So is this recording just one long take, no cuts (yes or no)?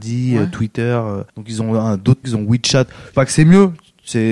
no